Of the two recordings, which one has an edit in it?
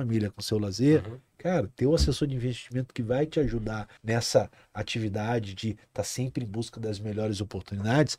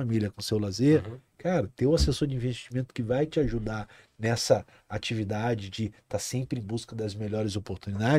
first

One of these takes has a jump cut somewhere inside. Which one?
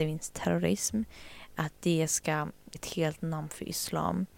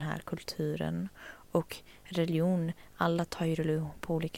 first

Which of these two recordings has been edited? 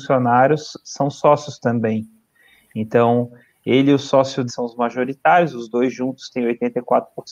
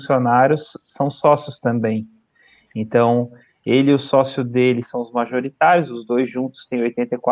first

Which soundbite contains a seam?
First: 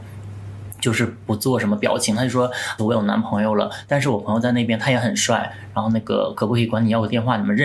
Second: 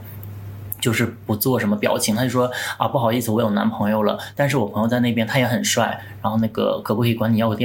first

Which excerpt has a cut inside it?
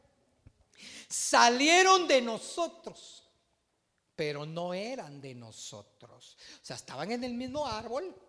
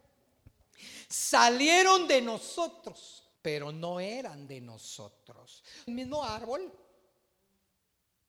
second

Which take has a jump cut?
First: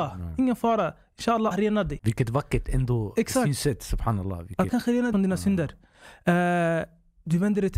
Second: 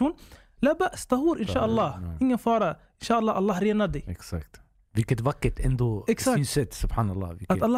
first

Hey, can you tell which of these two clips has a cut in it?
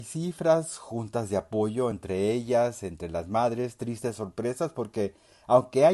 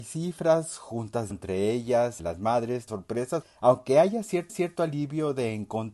second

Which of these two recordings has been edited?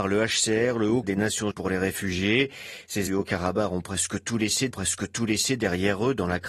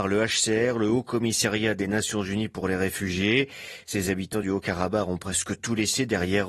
first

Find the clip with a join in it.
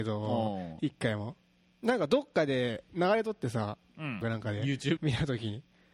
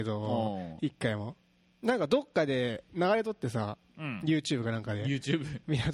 first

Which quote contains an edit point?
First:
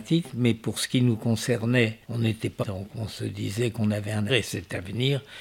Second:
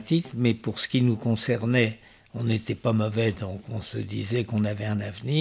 first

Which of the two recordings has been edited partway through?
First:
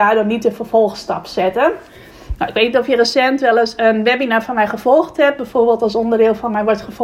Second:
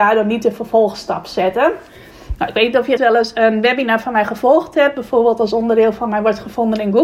second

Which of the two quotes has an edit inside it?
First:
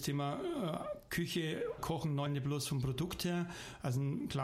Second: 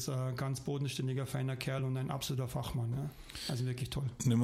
first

